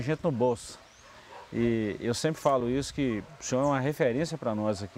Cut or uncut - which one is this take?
uncut